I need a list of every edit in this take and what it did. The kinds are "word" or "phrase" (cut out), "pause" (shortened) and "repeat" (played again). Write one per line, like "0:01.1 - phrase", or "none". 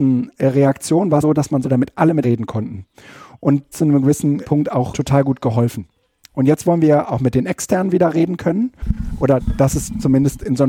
0:01.2 - phrase
0:01.6 - phrase
0:02.2 - word
0:03.7 - phrase
0:04.4 - word
0:04.9 - word